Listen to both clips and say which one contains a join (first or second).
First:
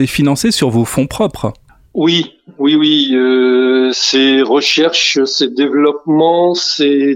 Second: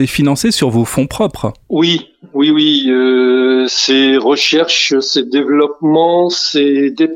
second